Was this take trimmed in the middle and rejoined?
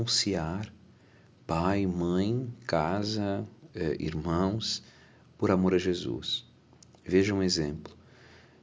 no; 0 cuts

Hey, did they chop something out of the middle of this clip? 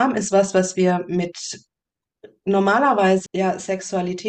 yes; 1 cut; at 3.3 s

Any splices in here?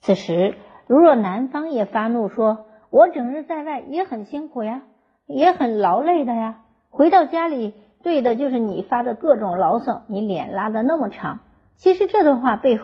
no; 0 cuts

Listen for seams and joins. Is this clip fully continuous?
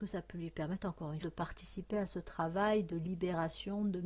no; 1 cut; at 1.2 s

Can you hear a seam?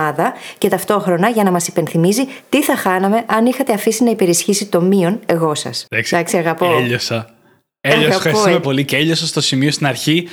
yes; 2 cuts; at 5.9 s, 8.6 s

